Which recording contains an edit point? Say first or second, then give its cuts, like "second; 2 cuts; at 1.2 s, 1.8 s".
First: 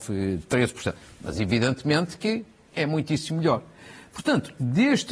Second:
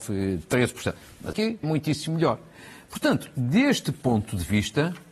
second; 2 cuts; at 1.3 s, 1.6 s